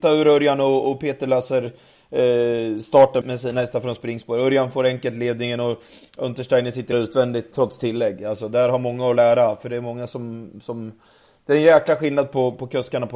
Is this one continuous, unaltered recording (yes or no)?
no